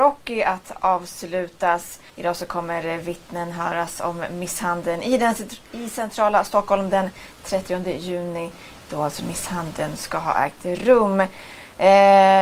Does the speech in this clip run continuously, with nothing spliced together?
no; 2 cuts; at 2.1 s, 9.2 s

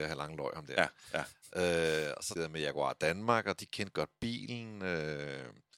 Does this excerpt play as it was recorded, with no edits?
no; 1 cut; at 2.4 s

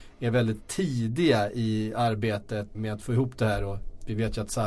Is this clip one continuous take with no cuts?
no; 1 cut; at 2.7 s

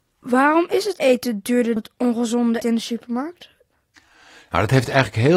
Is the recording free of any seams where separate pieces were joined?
no; 3 cuts; at 1.0 s, 1.8 s, 2.6 s

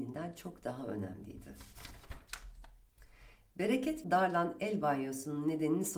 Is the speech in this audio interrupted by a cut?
yes; 1 cut; at 4.0 s

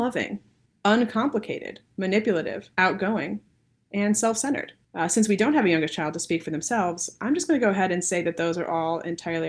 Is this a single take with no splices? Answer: no; 1 cut; at 2.7 s

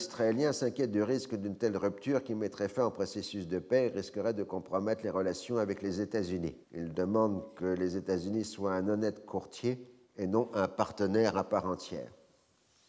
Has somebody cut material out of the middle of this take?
yes; 2 cuts; at 6.6 s, 10.0 s

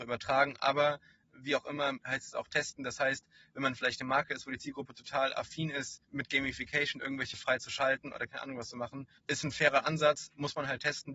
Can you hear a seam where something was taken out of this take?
yes; 4 cuts; at 2.0 s, 6.0 s, 7.3 s, 9.2 s

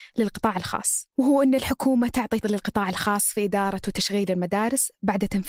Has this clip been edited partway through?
yes; 2 cuts; at 1.1 s, 2.4 s

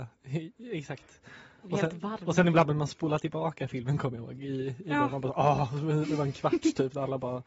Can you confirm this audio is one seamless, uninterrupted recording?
yes; 0 cuts

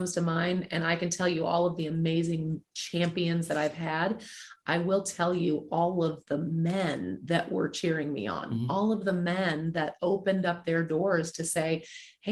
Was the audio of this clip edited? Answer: no; 0 cuts

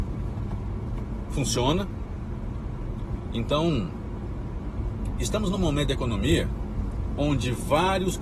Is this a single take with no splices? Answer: yes; 0 cuts

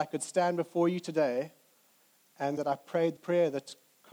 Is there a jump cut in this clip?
yes; 2 cuts; at 2.6 s, 3.2 s

